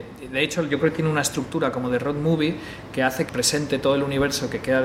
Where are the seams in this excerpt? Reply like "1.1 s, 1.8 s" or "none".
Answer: 3.3 s